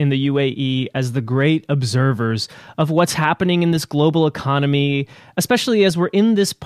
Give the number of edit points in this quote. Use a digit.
0